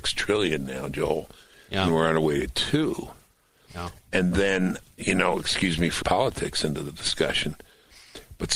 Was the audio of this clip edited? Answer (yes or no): yes